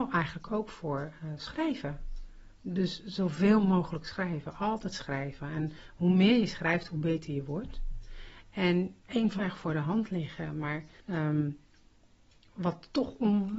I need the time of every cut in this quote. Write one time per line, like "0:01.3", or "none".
0:09.0
0:09.4
0:11.0